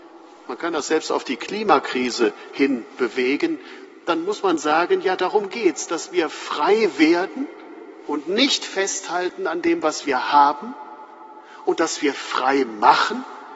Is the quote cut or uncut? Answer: uncut